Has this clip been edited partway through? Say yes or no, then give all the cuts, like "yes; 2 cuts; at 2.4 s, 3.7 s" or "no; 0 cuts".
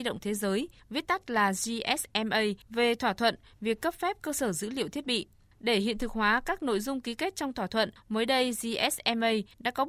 no; 0 cuts